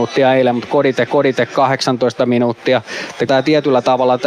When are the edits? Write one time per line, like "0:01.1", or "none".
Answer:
0:01.1
0:03.3